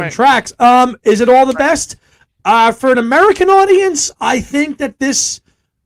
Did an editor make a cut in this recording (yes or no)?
no